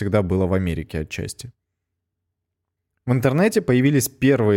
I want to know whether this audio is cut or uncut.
uncut